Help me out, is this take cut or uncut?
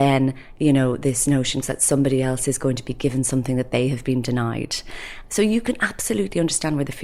cut